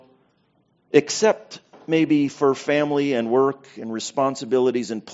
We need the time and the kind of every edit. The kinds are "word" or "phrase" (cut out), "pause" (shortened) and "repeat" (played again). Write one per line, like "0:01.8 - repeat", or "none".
none